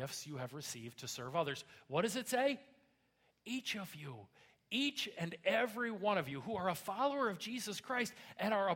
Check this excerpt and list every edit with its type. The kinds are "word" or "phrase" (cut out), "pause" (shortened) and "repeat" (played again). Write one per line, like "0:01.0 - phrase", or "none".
none